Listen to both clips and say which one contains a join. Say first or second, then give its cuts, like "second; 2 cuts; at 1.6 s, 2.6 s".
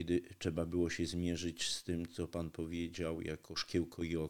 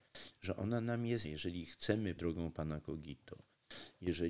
second; 2 cuts; at 1.2 s, 2.2 s